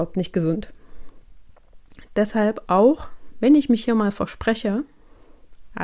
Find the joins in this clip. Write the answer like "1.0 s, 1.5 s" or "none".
none